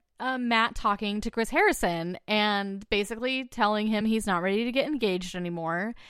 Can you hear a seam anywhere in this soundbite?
no; 0 cuts

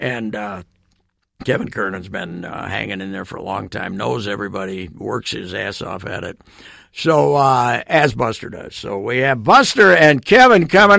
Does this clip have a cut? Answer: no; 0 cuts

